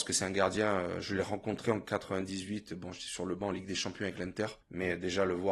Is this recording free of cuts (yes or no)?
no